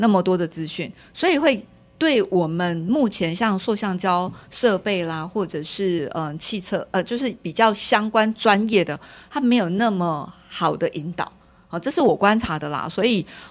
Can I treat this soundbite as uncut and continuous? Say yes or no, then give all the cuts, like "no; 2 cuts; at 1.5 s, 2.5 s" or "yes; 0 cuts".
yes; 0 cuts